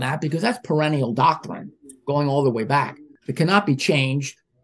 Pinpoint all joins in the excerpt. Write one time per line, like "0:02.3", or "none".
none